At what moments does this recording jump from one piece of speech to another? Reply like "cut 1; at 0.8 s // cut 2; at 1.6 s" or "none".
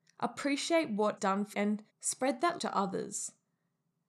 cut 1; at 1.2 s // cut 2; at 1.5 s // cut 3; at 1.9 s // cut 4; at 2.6 s